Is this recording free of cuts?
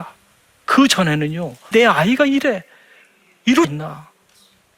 no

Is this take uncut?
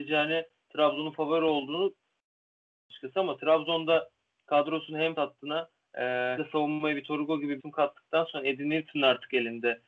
no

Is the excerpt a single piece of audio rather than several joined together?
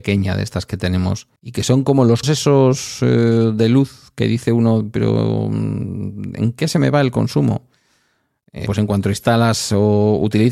no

